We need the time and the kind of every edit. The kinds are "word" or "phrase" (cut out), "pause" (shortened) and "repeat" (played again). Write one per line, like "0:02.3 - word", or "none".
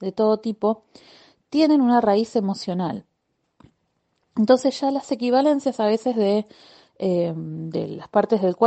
none